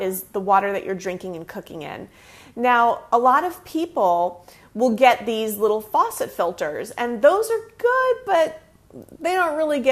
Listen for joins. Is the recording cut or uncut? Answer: uncut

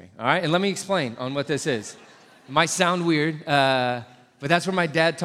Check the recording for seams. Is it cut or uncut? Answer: uncut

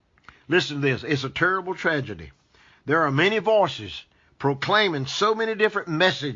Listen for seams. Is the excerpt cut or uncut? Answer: uncut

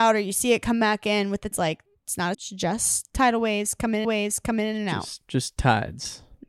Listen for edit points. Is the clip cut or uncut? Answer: cut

